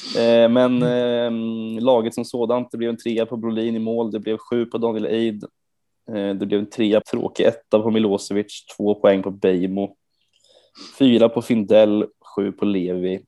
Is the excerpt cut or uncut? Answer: cut